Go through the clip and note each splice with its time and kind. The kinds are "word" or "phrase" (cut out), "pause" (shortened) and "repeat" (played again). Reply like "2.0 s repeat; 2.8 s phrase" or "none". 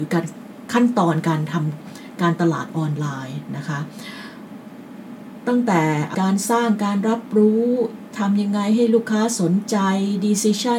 6.1 s word; 8.1 s word